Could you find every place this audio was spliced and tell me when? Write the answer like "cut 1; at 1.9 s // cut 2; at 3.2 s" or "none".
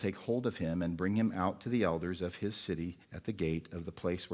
cut 1; at 3.0 s